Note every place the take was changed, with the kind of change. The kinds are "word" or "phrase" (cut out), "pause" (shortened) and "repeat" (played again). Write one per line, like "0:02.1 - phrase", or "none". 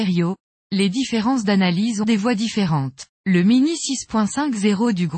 0:02.0 - phrase
0:03.1 - pause